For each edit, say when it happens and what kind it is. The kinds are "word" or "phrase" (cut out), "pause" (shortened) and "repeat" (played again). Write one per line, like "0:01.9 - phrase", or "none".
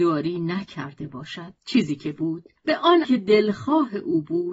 0:01.6 - pause
0:02.6 - pause
0:03.0 - word